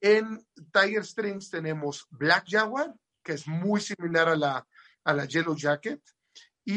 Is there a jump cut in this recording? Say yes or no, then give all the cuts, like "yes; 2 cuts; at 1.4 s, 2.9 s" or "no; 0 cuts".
no; 0 cuts